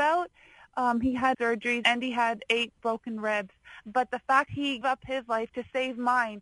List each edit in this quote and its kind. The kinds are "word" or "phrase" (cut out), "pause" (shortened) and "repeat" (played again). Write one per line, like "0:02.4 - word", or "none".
0:01.3 - word
0:01.8 - word
0:04.5 - word
0:04.8 - word